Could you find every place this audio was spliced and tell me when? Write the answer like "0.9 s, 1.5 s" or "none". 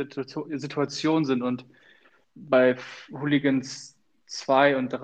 2.2 s